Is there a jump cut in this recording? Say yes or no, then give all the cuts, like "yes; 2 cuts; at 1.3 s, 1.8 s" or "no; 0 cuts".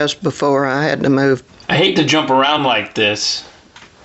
no; 0 cuts